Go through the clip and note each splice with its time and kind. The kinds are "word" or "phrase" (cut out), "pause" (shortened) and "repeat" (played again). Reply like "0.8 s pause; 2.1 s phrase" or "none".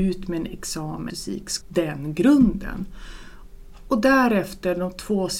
1.1 s phrase; 1.6 s word